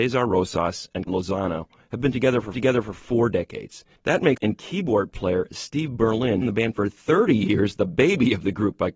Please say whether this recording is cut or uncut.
cut